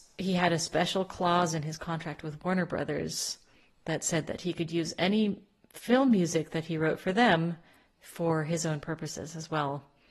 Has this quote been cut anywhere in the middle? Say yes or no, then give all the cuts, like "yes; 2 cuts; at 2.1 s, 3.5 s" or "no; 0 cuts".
no; 0 cuts